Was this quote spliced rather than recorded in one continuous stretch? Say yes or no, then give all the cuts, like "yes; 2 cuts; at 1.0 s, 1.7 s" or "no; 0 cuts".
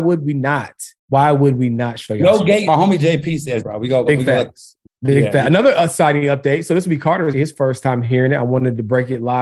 yes; 6 cuts; at 1.0 s, 2.7 s, 3.6 s, 4.1 s, 4.8 s, 7.3 s